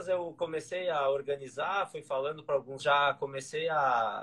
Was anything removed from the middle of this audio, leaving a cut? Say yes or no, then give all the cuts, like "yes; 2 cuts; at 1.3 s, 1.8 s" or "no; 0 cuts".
yes; 1 cut; at 2.8 s